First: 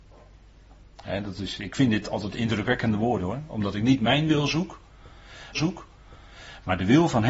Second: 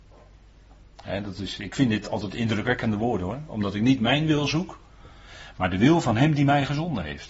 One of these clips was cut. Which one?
first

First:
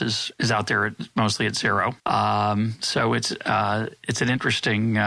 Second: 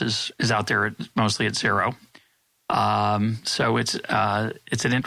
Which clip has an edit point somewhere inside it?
first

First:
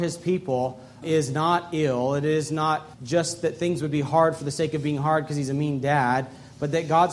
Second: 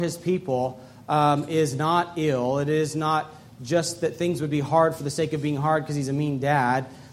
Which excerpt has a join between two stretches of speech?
first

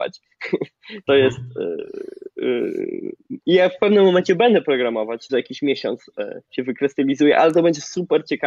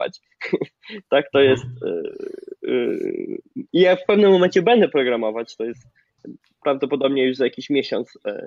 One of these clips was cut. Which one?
first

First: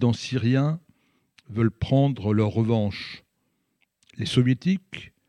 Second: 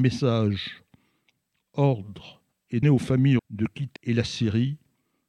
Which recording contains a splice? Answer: second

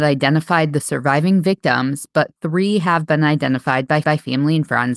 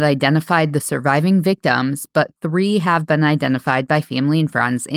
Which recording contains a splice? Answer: first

